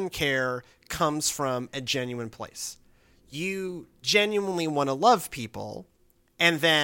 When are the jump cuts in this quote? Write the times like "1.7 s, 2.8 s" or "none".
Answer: none

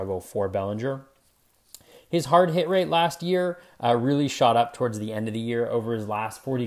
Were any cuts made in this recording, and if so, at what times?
none

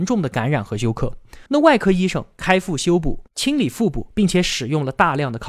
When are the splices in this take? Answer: 1.5 s

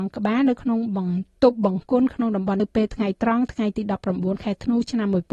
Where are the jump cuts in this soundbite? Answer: 2.6 s

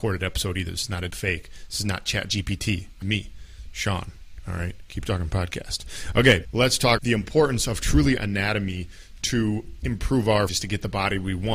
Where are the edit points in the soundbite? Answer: 1.1 s, 3.0 s, 6.4 s, 7.0 s, 8.2 s, 10.5 s

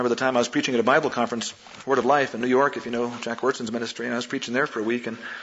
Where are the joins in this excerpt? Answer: none

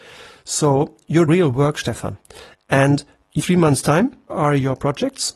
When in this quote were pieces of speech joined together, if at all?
1.3 s, 3.4 s, 4.3 s

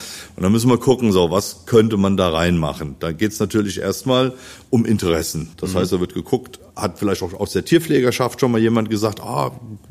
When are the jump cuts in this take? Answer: 5.5 s

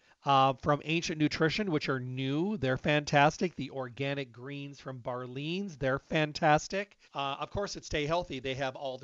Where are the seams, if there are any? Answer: 7.0 s

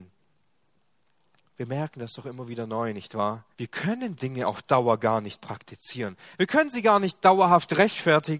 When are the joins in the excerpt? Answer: 3.5 s, 4.2 s

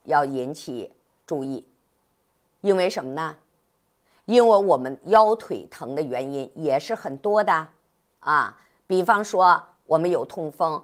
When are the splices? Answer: none

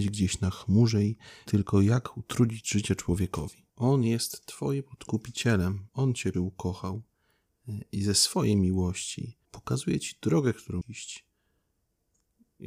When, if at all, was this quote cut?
1.5 s, 3.7 s, 5.9 s, 6.3 s, 9.4 s, 10.8 s

